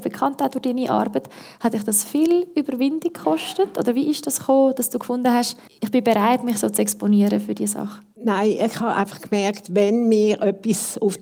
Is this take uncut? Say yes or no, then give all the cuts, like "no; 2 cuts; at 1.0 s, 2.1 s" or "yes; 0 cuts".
no; 1 cut; at 8.1 s